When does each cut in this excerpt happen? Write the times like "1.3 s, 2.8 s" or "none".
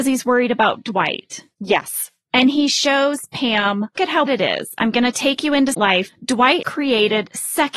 4.0 s, 4.3 s, 5.7 s, 6.6 s